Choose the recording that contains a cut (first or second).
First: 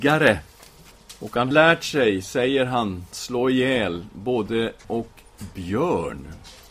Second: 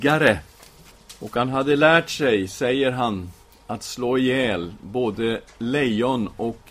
first